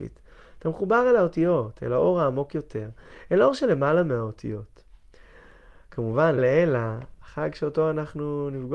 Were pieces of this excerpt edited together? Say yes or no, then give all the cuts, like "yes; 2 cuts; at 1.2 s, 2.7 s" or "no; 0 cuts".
yes; 1 cut; at 6.4 s